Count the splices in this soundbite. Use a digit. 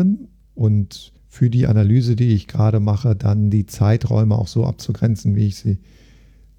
1